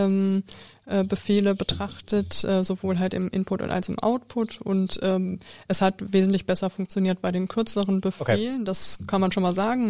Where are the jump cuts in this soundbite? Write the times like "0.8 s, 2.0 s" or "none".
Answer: none